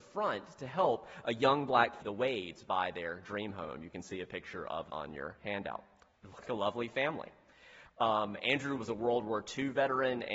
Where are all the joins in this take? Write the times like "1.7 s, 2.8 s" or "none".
2.0 s, 4.9 s, 6.4 s, 8.8 s